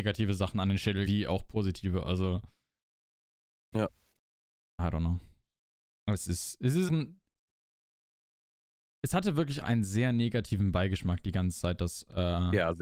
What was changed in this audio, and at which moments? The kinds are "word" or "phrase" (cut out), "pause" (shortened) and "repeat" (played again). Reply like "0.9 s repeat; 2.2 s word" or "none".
1.1 s word; 3.7 s word; 6.9 s word; 9.6 s word